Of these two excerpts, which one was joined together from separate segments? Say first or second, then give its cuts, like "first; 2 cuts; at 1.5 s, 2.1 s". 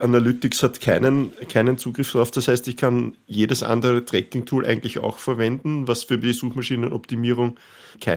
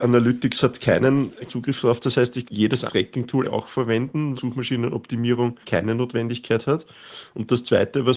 second; 6 cuts; at 1.5 s, 2.4 s, 2.9 s, 3.4 s, 4.4 s, 5.6 s